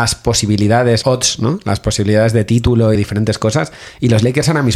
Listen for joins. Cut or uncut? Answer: cut